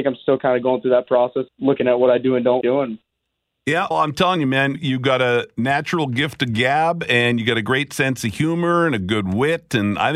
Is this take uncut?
no; 4 cuts; at 1.5 s, 2.6 s, 3.9 s, 4.7 s

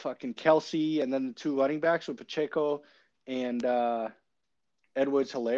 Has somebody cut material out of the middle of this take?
no; 0 cuts

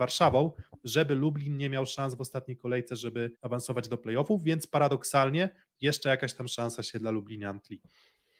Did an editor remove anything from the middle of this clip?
yes; 1 cut; at 3.3 s

